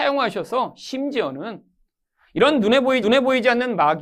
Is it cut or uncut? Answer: cut